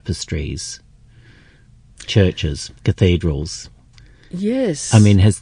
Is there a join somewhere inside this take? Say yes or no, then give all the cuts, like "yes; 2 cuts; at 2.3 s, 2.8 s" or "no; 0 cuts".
yes; 2 cuts; at 2.1 s, 2.8 s